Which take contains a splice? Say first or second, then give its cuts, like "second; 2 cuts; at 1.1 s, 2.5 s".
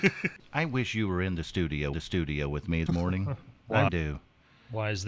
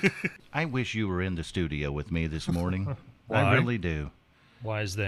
first; 3 cuts; at 1.9 s, 2.9 s, 3.9 s